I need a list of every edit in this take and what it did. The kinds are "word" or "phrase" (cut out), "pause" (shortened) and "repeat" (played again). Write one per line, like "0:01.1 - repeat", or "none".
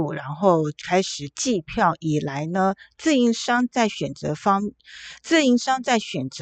none